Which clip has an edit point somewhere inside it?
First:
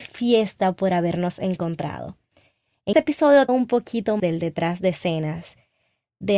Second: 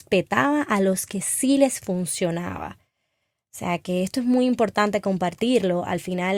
first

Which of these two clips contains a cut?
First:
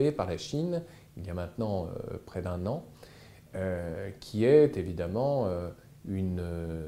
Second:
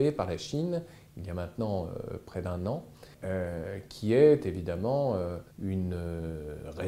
second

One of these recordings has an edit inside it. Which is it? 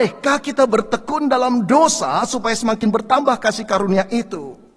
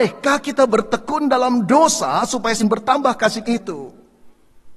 second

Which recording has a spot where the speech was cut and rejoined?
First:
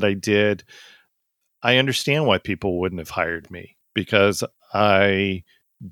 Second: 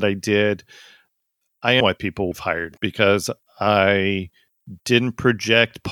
second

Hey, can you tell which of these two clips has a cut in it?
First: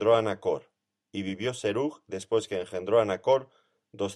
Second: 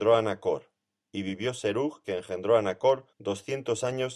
second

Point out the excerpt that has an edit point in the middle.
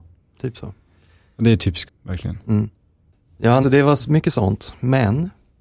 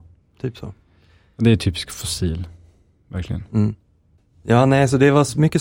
first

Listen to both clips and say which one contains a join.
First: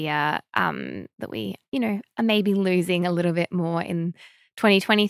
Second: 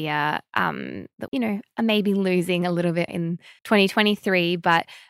second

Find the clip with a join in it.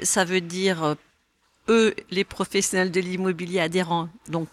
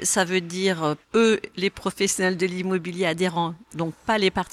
second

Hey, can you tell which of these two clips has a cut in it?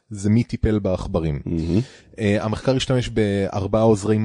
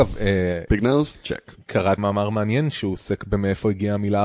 second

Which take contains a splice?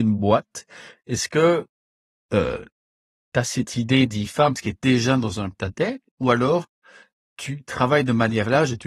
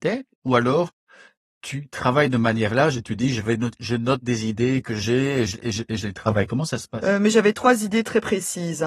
first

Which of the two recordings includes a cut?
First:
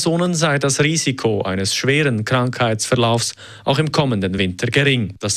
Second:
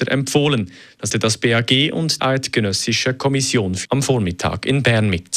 second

